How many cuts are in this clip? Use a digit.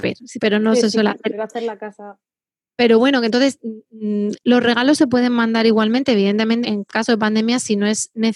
1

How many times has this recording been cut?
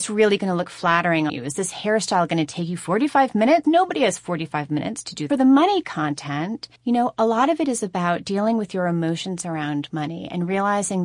4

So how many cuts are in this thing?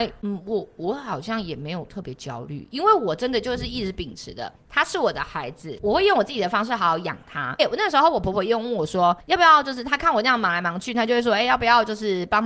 2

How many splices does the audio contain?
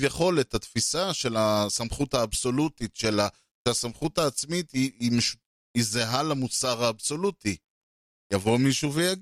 0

